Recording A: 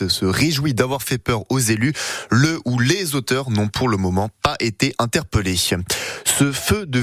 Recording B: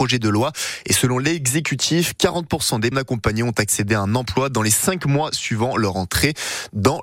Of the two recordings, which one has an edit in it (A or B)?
B